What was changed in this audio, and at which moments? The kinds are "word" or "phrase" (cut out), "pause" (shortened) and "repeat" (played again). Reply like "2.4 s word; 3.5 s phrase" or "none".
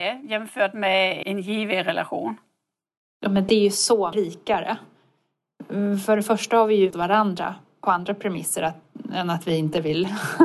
1.2 s word; 4.1 s word; 6.9 s word